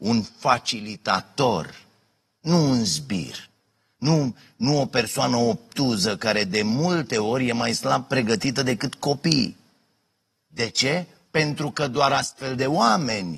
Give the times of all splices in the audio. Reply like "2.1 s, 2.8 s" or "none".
none